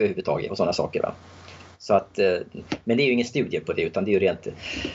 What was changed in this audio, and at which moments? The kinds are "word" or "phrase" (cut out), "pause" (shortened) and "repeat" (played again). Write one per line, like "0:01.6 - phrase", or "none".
none